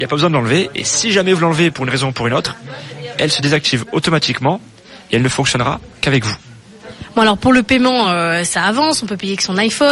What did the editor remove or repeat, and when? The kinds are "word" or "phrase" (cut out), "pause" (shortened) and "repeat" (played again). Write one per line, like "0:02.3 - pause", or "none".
none